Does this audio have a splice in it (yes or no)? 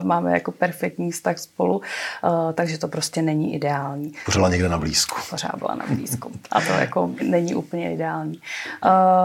yes